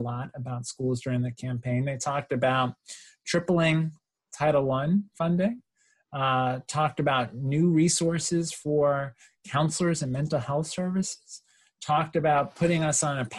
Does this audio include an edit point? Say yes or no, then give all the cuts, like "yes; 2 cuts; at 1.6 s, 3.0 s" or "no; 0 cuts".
no; 0 cuts